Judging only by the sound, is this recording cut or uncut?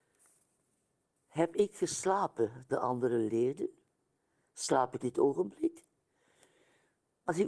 cut